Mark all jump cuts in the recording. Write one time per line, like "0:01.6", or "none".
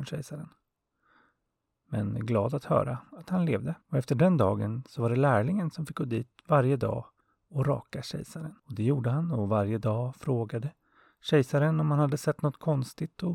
0:03.8
0:07.2
0:08.6